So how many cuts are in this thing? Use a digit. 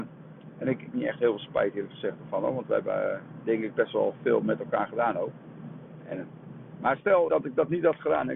2